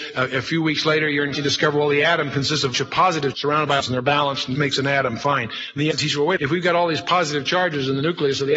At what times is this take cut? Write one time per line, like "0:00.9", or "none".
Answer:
0:01.3
0:02.7
0:03.3
0:03.8
0:04.5
0:05.9
0:06.4